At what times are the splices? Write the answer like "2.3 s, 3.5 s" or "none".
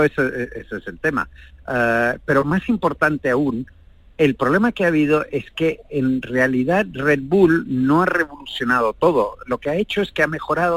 none